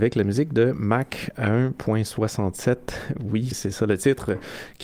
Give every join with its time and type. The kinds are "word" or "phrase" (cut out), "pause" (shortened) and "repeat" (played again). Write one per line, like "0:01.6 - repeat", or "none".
0:03.5 - word